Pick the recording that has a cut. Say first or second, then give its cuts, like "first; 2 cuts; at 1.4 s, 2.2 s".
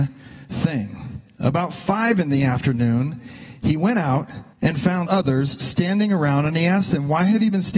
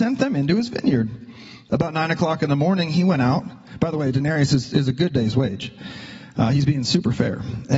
first; 2 cuts; at 4.5 s, 5.1 s